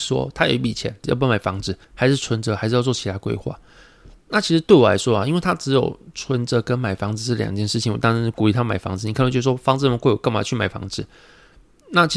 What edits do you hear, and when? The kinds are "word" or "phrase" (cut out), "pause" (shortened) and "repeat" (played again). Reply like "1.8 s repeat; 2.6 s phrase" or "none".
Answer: 1.8 s pause